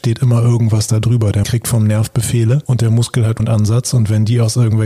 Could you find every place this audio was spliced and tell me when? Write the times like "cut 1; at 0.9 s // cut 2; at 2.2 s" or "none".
cut 1; at 1.4 s // cut 2; at 3.4 s

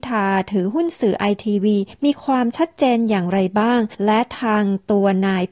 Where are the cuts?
cut 1; at 1.9 s // cut 2; at 3.9 s

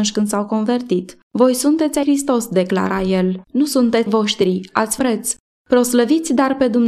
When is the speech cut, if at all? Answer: cut 1; at 1.3 s // cut 2; at 2.0 s // cut 3; at 3.4 s // cut 4; at 4.1 s // cut 5; at 5.0 s

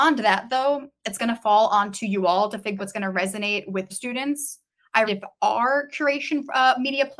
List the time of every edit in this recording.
cut 1; at 2.8 s // cut 2; at 3.9 s // cut 3; at 5.0 s

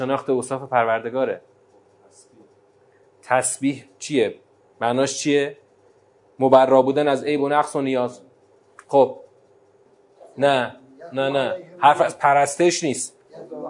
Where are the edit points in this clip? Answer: none

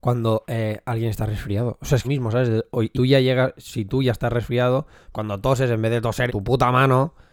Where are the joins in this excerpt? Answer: cut 1; at 2.0 s // cut 2; at 2.9 s // cut 3; at 5.1 s // cut 4; at 6.3 s

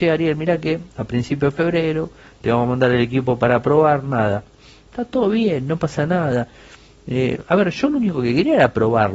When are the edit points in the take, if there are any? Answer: none

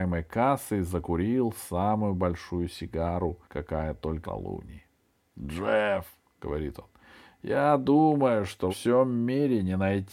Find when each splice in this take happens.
cut 1; at 3.4 s // cut 2; at 4.2 s // cut 3; at 8.7 s

